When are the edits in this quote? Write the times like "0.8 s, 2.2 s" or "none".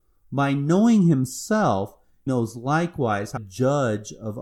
2.3 s, 3.4 s